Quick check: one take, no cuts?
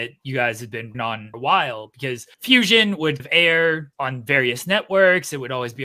no; 5 cuts; at 0.9 s, 1.3 s, 2.3 s, 3.2 s, 3.9 s

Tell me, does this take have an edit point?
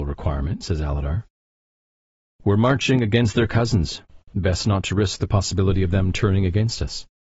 no; 0 cuts

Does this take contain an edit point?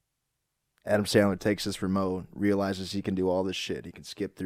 no; 0 cuts

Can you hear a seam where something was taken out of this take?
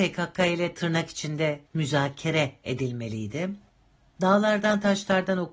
yes; 1 cut; at 1.7 s

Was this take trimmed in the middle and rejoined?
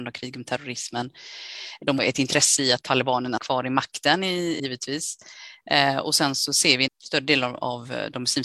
yes; 4 cuts; at 2.0 s, 3.4 s, 4.6 s, 6.9 s

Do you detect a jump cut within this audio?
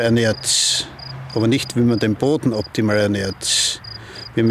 no; 0 cuts

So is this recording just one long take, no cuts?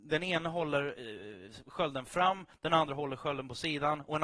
yes; 0 cuts

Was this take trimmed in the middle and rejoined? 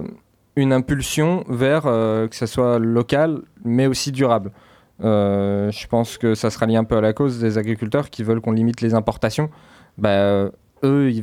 no; 0 cuts

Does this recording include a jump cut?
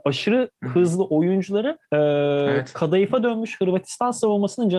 yes; 1 cut; at 1.8 s

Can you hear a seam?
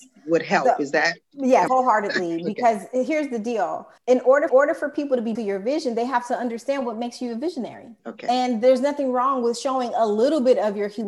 yes; 6 cuts; at 1.2 s, 1.7 s, 4.0 s, 4.5 s, 5.3 s, 8.0 s

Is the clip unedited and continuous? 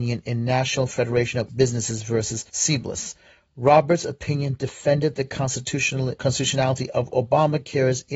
no; 3 cuts; at 1.5 s, 2.5 s, 6.2 s

